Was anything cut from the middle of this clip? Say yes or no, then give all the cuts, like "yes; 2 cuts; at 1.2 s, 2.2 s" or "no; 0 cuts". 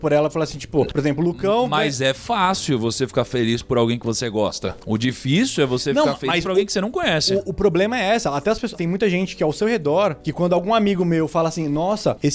yes; 1 cut; at 8.7 s